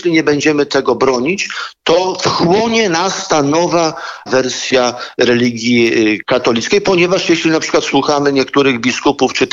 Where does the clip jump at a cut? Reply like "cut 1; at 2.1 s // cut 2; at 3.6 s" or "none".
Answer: cut 1; at 4.3 s